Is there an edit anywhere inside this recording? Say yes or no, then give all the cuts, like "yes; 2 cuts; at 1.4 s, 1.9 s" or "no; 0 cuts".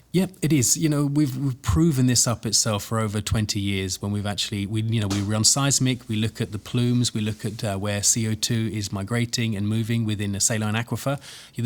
no; 0 cuts